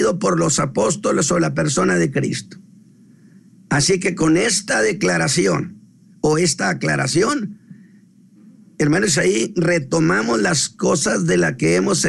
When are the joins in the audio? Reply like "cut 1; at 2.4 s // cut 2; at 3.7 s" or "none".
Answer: none

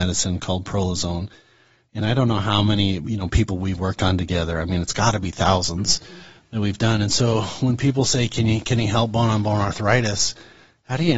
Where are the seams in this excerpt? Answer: none

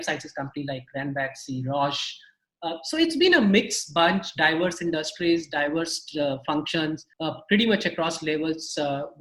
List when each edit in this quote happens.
cut 1; at 7.1 s

